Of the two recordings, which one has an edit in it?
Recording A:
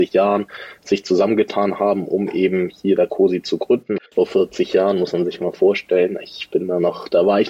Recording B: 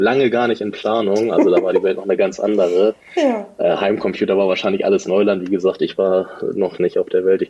A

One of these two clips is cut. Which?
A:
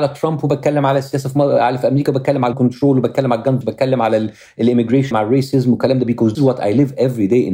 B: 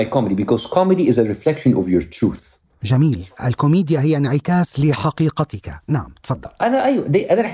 A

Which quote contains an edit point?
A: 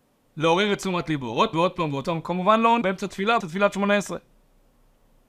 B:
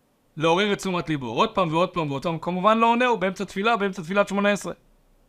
A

